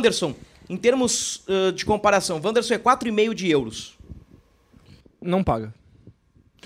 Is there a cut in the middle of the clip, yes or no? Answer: no